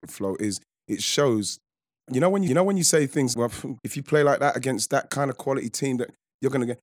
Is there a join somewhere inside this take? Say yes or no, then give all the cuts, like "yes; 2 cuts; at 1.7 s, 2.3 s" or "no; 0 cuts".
yes; 4 cuts; at 2.1 s, 2.5 s, 3.3 s, 3.8 s